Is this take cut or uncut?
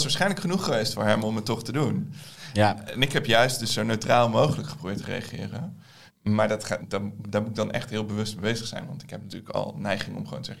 cut